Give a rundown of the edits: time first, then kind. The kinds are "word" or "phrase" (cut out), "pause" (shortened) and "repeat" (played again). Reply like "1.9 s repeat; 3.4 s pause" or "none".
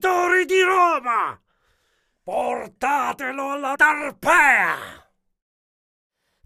3.8 s word